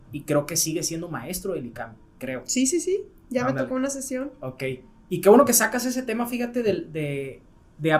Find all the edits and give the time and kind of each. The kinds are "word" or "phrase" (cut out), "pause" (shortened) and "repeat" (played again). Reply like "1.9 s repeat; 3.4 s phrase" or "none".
none

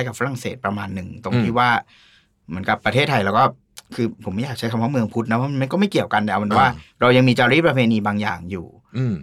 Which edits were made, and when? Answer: none

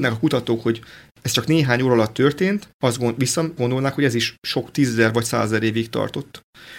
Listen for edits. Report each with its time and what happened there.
3.6 s word

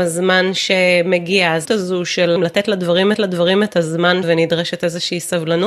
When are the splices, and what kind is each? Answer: 1.6 s word; 2.4 s word; 3.1 s repeat; 4.2 s word

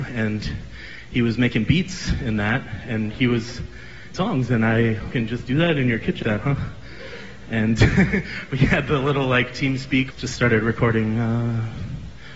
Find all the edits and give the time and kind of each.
4.1 s word; 5.1 s phrase; 6.2 s word; 10.1 s phrase

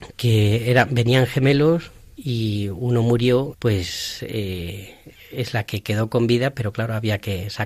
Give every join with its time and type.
3.5 s phrase

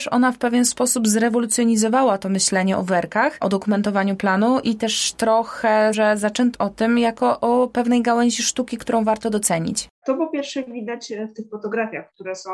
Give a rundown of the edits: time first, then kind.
5.9 s word; 6.5 s word

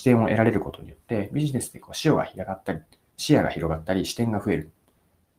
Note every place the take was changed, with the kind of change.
none

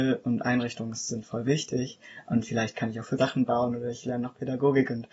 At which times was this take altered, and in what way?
3.2 s word

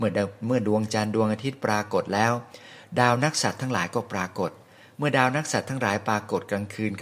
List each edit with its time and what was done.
none

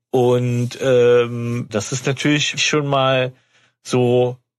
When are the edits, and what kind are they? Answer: 1.7 s word; 2.6 s word

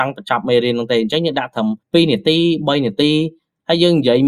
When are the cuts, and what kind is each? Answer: 1.8 s pause

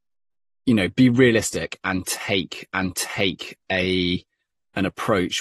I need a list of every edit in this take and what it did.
2.7 s repeat

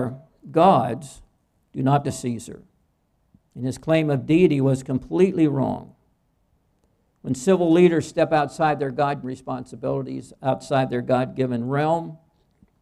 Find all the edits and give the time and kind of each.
2.0 s word; 9.2 s word

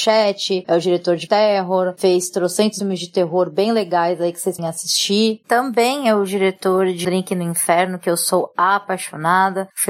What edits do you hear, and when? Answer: 1.3 s word; 2.8 s word; 4.6 s word; 7.0 s word

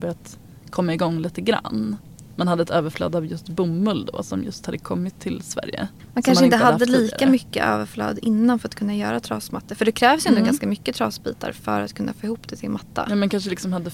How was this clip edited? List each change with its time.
none

